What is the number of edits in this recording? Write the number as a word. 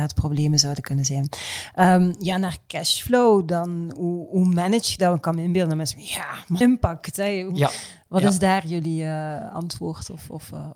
one